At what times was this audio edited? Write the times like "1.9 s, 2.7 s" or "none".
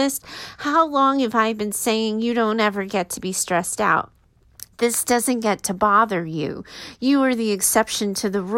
4.7 s